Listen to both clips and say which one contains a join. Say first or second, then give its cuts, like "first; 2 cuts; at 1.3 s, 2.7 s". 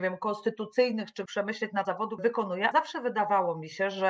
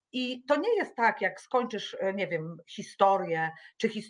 first; 4 cuts; at 1.3 s, 1.8 s, 2.2 s, 2.7 s